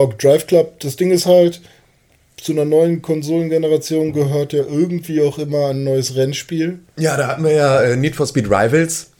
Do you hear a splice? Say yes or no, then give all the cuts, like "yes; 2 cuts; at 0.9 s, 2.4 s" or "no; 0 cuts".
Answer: no; 0 cuts